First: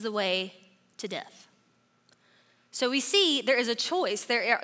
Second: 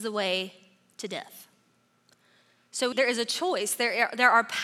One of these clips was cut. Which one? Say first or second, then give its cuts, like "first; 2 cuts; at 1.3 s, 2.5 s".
second; 1 cut; at 2.9 s